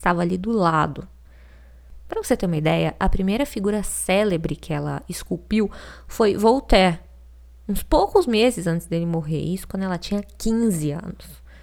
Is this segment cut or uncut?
uncut